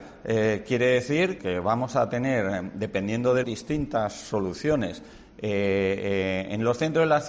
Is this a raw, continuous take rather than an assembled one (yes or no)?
no